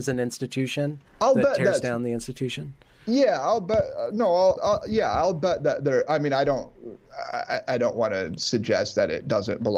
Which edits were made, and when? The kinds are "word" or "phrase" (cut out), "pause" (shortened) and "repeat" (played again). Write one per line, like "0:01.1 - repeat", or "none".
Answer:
0:01.1 - pause
0:04.6 - word